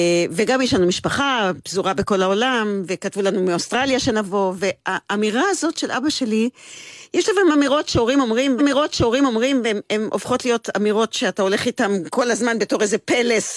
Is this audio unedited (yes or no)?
no